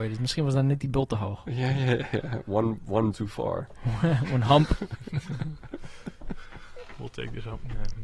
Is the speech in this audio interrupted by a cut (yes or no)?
yes